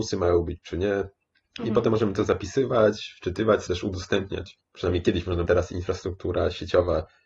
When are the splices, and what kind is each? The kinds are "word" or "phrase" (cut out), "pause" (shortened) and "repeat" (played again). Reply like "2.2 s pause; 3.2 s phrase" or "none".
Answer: 3.7 s phrase; 4.6 s pause; 5.5 s phrase